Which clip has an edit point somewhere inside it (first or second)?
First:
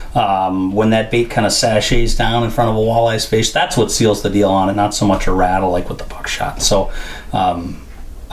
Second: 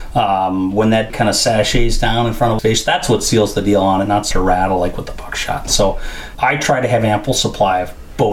second